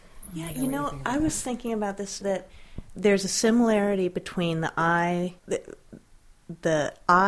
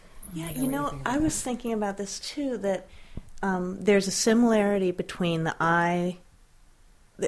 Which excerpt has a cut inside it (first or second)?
first